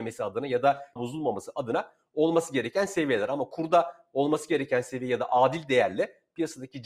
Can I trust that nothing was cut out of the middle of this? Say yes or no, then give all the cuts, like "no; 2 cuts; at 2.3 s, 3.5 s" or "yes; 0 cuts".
no; 1 cut; at 1.0 s